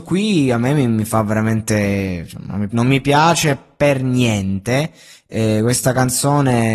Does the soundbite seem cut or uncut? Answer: cut